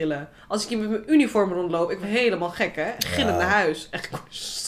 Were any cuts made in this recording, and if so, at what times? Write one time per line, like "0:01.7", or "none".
0:02.0